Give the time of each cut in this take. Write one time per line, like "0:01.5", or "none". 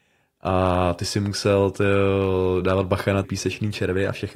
0:03.2